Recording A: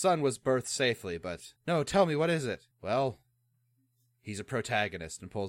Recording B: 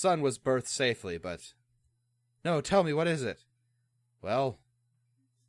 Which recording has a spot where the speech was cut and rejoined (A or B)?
A